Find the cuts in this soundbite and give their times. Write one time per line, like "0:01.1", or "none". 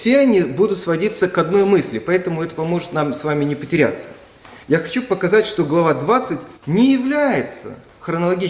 0:04.6
0:06.6